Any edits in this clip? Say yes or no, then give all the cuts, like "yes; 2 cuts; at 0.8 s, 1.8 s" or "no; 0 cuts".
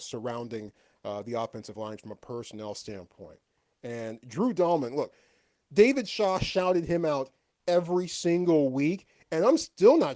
no; 0 cuts